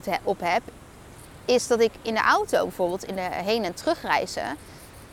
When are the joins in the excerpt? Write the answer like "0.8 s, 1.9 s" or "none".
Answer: none